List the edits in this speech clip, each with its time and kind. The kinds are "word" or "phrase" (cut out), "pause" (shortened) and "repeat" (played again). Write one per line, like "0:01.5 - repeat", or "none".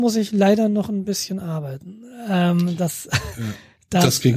none